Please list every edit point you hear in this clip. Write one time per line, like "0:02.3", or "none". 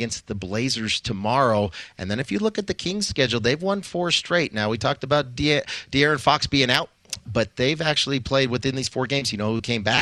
0:07.2